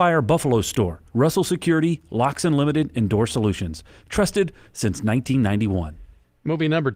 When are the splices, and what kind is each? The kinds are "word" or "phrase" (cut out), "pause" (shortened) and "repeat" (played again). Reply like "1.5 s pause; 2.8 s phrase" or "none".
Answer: 1.1 s pause